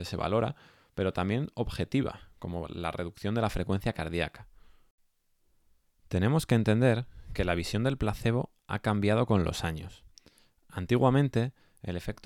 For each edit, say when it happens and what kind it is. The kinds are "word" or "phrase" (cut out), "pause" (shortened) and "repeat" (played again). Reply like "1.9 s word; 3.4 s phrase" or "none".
none